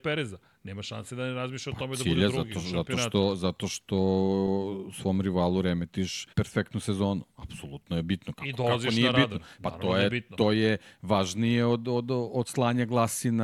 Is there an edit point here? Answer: yes; 2 cuts; at 6.3 s, 7.3 s

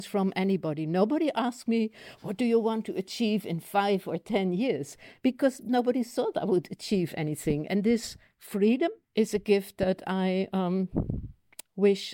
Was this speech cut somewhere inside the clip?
yes; 1 cut; at 9.0 s

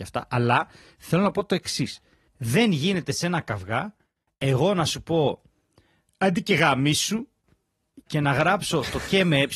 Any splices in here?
no; 0 cuts

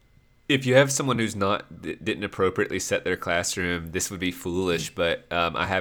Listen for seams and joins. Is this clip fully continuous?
yes; 0 cuts

